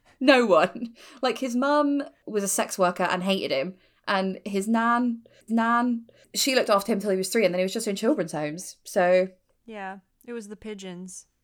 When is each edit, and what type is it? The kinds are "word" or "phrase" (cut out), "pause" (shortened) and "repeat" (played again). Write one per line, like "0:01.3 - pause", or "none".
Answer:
0:05.5 - repeat